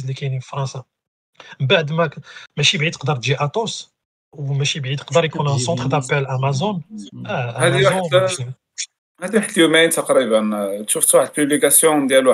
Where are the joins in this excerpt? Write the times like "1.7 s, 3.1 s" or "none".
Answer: none